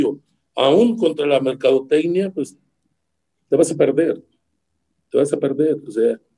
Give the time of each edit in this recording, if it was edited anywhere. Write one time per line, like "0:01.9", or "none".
none